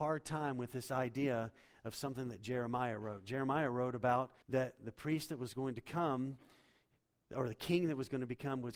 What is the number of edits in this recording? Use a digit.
1